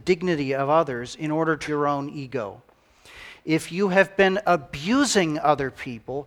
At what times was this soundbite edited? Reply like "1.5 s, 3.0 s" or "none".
1.7 s